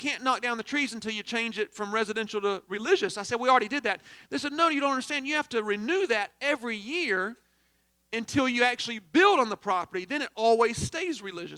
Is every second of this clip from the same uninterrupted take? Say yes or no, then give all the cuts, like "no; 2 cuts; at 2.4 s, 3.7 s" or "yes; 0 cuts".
yes; 0 cuts